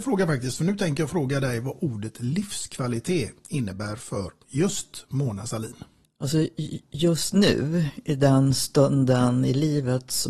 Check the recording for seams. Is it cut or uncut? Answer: uncut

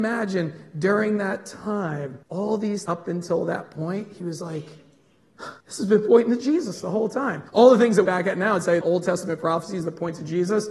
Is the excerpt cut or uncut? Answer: cut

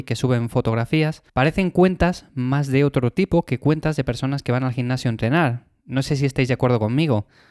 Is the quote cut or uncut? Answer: cut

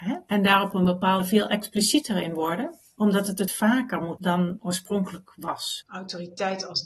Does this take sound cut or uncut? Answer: cut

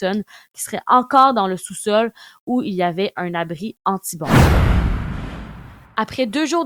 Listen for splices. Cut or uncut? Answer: uncut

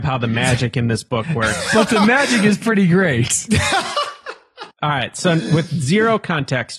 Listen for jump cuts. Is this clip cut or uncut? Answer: cut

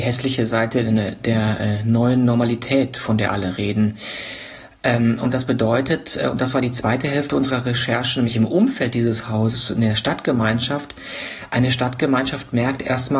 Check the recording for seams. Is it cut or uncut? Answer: uncut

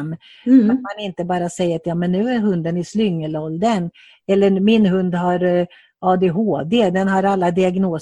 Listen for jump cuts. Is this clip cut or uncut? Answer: uncut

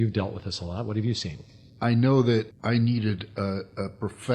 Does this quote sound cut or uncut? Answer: cut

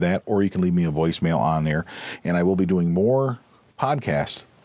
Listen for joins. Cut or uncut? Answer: uncut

